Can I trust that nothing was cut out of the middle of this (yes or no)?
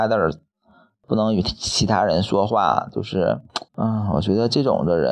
no